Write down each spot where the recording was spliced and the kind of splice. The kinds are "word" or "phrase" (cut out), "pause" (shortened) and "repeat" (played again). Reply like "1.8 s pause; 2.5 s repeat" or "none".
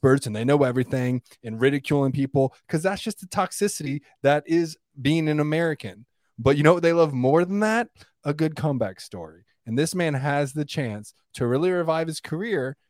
none